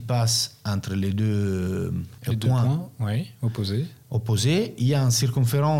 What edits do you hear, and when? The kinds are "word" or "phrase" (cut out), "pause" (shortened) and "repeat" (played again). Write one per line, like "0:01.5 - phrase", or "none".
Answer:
0:02.2 - pause